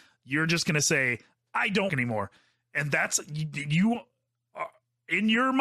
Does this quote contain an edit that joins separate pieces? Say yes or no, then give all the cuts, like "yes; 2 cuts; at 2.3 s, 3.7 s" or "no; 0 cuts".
yes; 1 cut; at 1.9 s